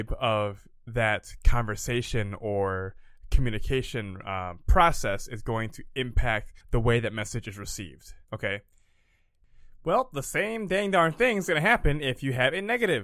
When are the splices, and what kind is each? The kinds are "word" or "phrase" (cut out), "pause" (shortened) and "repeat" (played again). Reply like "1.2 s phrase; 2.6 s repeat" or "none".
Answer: 6.6 s pause; 8.2 s pause